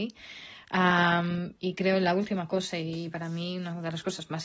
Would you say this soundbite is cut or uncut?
uncut